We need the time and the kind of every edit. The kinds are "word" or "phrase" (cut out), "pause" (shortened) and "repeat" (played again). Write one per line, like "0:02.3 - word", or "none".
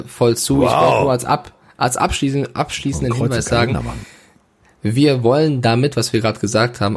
none